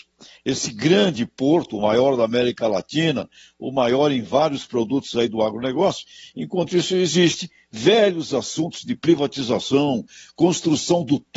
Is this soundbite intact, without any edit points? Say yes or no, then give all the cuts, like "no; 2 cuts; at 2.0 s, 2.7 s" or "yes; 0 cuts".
yes; 0 cuts